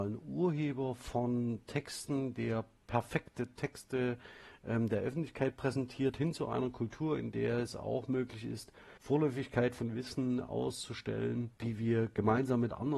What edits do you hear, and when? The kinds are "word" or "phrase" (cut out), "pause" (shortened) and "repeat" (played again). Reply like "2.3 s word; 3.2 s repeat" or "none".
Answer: 9.0 s pause; 11.6 s pause